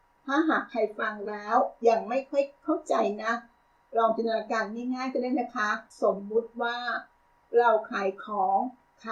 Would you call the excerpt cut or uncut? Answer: cut